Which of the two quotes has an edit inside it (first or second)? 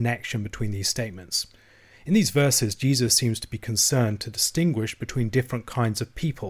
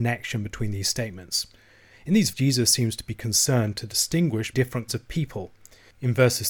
second